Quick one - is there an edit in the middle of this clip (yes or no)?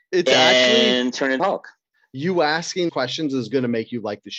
yes